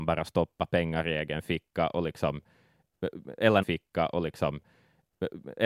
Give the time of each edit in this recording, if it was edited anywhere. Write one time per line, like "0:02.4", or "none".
0:03.6